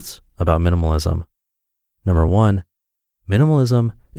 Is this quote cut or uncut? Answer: uncut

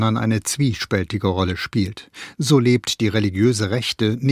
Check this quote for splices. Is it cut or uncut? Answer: uncut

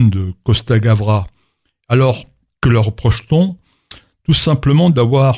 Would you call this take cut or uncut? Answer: uncut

